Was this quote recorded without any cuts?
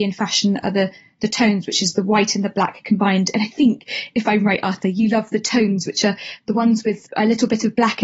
yes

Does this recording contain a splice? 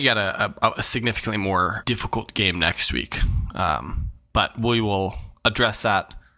yes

